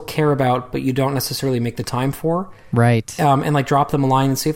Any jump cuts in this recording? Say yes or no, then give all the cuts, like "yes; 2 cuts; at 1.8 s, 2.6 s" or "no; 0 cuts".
no; 0 cuts